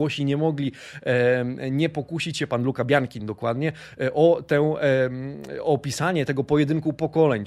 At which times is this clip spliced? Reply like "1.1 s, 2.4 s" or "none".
none